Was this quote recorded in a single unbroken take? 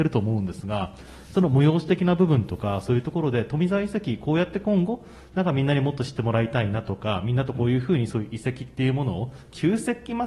yes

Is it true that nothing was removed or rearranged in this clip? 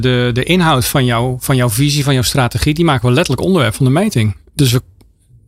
yes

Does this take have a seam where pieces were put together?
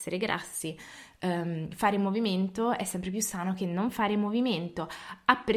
no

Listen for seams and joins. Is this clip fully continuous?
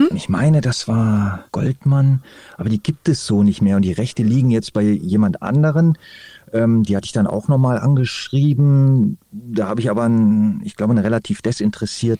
no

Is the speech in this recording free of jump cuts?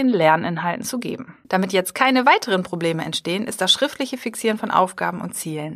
no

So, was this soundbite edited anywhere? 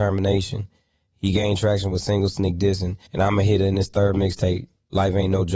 yes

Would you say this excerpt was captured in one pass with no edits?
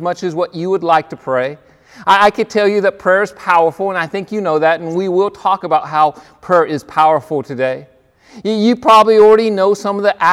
yes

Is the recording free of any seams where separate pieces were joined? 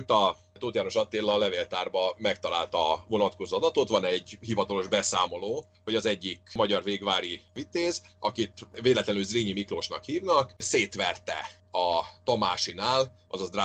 yes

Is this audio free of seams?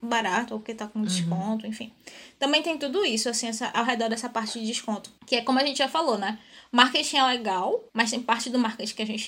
no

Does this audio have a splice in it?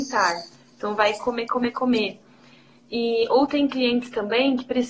no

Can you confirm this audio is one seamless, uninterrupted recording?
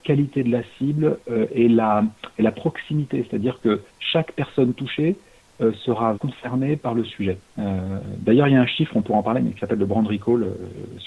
no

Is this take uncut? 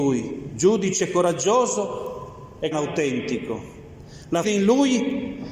no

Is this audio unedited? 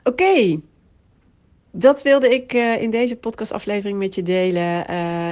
yes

